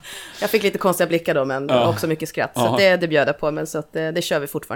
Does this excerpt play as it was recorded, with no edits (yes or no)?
yes